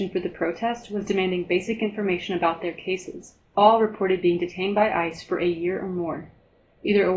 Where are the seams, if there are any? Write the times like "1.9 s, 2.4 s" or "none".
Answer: none